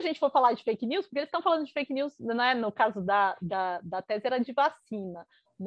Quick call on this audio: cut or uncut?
uncut